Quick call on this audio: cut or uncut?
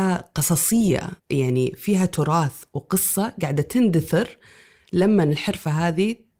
cut